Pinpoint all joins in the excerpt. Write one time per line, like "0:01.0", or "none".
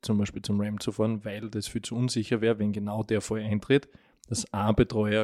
0:04.0